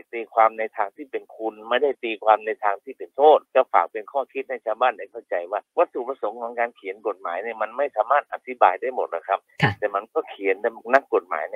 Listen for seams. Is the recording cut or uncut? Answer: cut